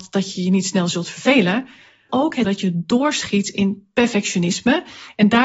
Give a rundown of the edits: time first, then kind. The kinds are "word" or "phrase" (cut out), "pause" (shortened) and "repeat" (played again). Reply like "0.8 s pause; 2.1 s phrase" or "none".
2.1 s word; 2.4 s word